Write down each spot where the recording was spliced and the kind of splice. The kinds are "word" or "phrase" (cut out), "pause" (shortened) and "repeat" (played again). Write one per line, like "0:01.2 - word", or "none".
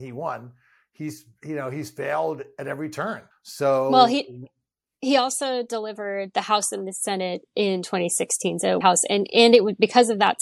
0:02.6 - word
0:03.3 - pause
0:04.7 - pause
0:08.8 - phrase